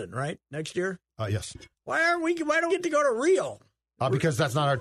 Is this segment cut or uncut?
cut